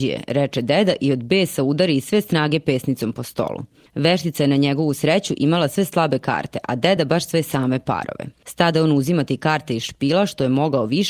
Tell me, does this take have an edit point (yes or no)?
no